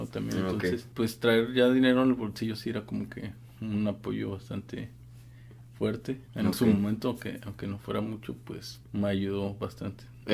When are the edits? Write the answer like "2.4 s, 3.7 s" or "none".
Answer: 6.2 s, 8.8 s